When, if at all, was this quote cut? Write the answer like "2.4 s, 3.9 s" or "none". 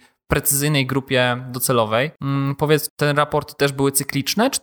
2.9 s